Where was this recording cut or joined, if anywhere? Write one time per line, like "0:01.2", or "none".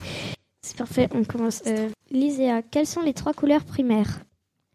0:02.0